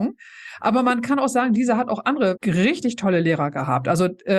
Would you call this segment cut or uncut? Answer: cut